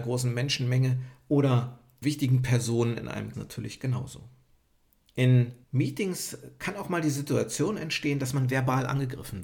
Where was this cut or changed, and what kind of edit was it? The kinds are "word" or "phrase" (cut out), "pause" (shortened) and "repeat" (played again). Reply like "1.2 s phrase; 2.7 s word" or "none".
2.0 s word; 3.3 s phrase; 5.6 s pause